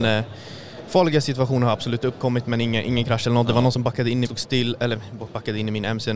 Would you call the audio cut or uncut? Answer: cut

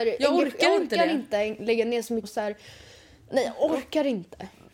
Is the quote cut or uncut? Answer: cut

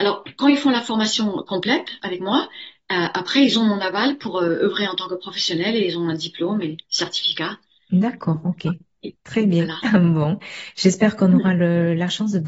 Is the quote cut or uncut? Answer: cut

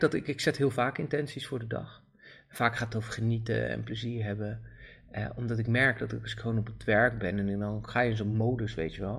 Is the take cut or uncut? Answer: uncut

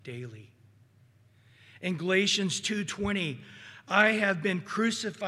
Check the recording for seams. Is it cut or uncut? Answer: uncut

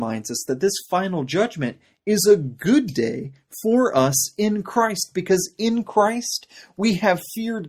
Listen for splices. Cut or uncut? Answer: uncut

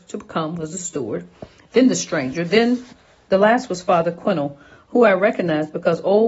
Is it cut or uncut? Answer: uncut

